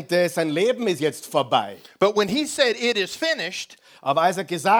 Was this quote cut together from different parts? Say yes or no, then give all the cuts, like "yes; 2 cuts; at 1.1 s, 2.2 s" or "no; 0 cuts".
no; 0 cuts